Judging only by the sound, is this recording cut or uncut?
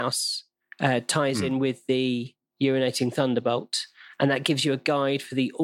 uncut